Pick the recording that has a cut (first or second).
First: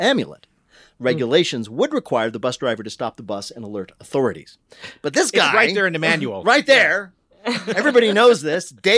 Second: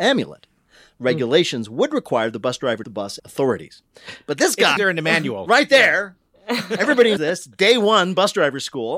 second